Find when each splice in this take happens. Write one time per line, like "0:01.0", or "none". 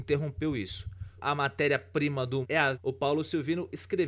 0:01.2
0:02.4
0:02.7

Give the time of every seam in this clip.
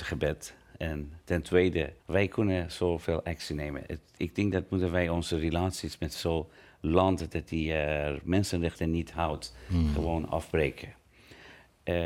0:02.0

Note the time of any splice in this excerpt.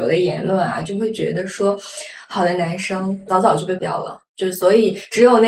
0:03.8

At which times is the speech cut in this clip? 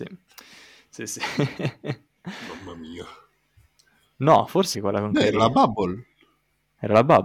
0:04.7

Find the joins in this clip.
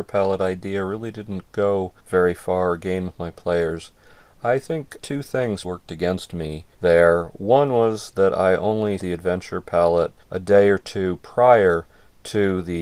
0:02.0
0:03.1
0:05.0
0:05.6
0:06.7
0:09.0
0:10.2

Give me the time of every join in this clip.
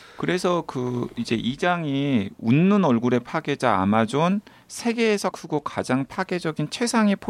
0:05.3

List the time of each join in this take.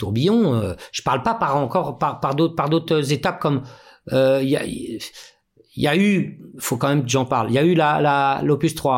none

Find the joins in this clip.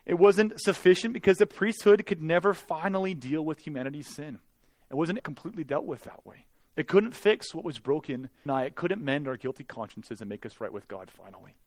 0:05.2
0:06.5
0:08.5

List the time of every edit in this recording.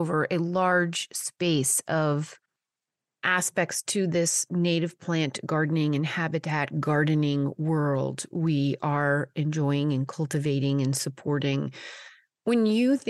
none

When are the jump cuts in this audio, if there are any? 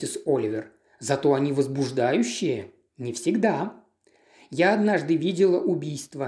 none

